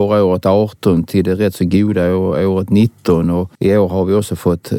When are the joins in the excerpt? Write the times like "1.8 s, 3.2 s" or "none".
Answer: 3.5 s

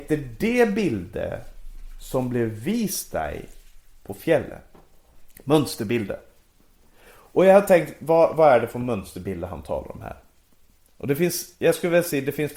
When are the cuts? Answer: none

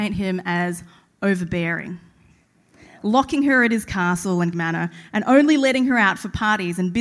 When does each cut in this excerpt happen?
4.5 s

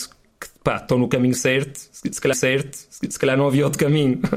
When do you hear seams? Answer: 2.3 s

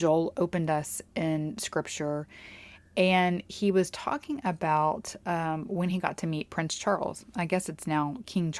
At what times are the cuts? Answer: none

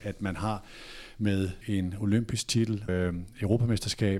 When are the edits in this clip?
1.6 s, 2.9 s

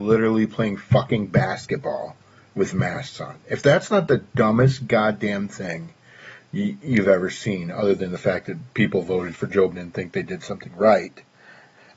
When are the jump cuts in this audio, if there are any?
9.7 s

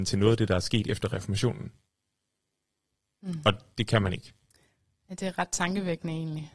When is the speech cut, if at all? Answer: none

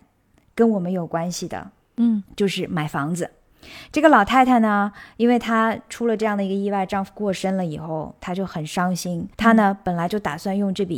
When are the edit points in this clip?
9.3 s

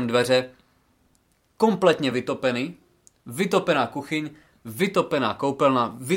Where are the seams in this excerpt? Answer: none

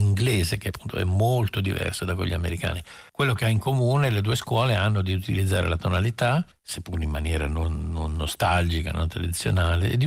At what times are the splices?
3.1 s, 6.5 s

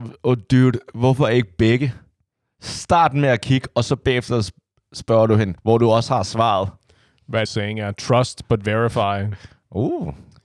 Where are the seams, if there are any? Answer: 5.6 s, 7.5 s

